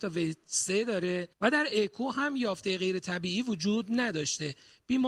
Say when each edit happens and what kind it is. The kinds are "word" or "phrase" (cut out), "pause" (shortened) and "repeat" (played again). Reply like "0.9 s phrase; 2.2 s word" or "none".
1.3 s pause